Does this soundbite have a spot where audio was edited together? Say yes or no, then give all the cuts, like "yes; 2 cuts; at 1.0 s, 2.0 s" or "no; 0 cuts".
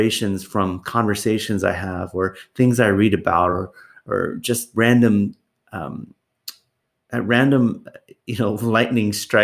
no; 0 cuts